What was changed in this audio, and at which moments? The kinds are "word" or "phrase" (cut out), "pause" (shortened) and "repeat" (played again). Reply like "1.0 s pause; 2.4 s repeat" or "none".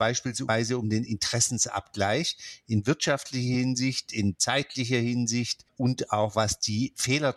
none